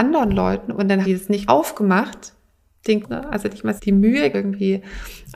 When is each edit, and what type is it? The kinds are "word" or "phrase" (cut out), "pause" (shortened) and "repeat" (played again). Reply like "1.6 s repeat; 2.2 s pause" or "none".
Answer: 1.0 s word; 1.5 s word; 3.0 s word; 3.8 s word; 4.3 s word